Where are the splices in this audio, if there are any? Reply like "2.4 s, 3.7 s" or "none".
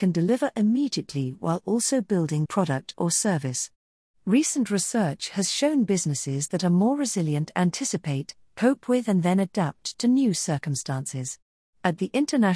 2.5 s